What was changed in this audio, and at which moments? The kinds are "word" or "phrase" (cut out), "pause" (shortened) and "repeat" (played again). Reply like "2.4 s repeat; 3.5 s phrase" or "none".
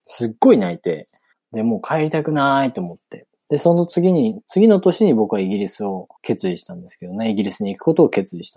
1.3 s pause; 6.2 s pause